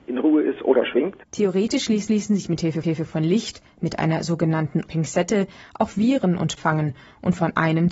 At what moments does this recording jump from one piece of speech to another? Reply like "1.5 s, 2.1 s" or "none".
1.2 s, 2.1 s, 2.8 s, 4.9 s, 6.6 s